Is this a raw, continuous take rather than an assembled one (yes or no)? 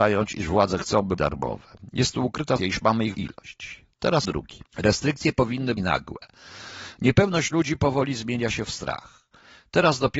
no